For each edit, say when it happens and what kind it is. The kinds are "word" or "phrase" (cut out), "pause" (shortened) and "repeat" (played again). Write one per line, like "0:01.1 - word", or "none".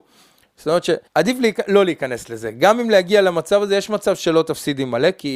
0:01.1 - pause